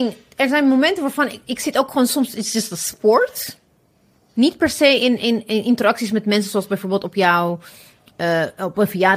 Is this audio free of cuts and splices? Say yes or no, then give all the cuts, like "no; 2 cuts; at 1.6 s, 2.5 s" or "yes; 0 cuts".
yes; 0 cuts